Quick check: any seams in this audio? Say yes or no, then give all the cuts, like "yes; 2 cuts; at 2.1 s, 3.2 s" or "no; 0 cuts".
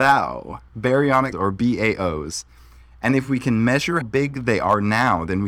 yes; 2 cuts; at 1.3 s, 4.0 s